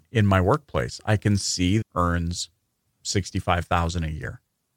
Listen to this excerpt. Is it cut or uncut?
cut